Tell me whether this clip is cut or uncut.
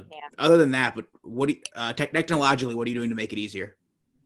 uncut